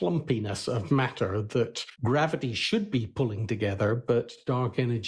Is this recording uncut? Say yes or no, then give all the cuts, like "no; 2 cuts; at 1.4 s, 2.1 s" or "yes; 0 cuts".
no; 1 cut; at 1.9 s